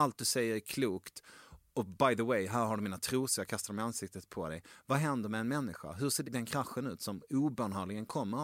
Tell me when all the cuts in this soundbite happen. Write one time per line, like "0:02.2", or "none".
0:06.2